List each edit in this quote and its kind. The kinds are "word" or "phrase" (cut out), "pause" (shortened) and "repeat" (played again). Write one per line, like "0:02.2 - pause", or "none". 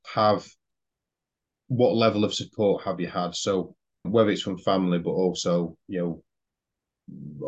0:04.0 - word